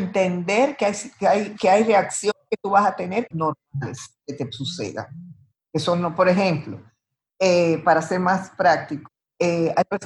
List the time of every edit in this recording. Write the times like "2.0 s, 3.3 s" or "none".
3.3 s

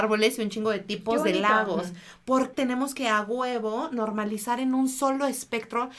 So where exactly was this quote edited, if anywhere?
2.5 s

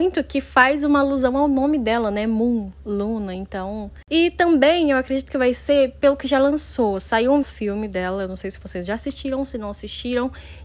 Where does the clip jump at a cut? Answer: 7.4 s

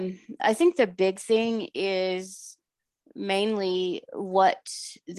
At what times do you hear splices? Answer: none

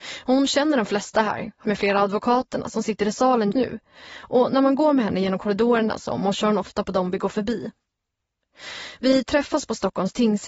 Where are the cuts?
1.6 s, 3.5 s

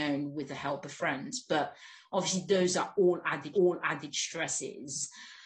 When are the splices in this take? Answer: 3.5 s

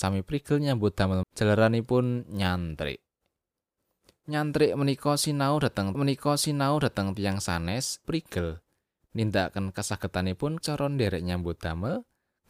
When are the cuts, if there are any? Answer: 1.2 s, 5.9 s, 8.0 s, 10.6 s

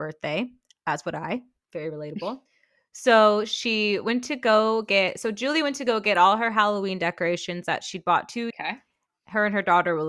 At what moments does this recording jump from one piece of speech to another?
2.5 s, 8.5 s

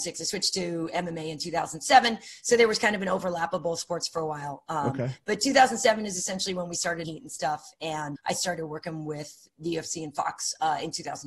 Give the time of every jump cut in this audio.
7.0 s, 8.2 s

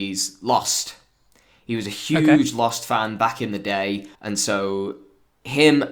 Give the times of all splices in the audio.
4.1 s

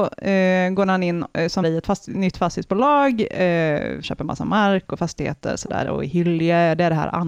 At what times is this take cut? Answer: 1.6 s, 4.0 s

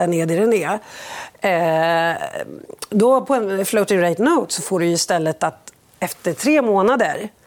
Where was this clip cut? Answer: none

